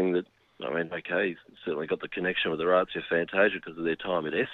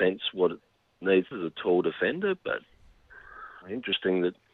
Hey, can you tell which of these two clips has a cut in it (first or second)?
second